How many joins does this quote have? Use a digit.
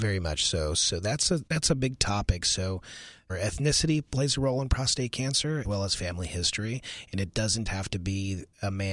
4